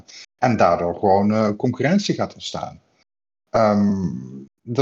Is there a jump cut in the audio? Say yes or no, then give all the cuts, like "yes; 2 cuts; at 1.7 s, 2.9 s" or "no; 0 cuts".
no; 0 cuts